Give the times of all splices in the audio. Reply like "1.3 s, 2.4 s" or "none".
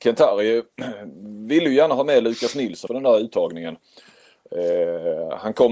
2.9 s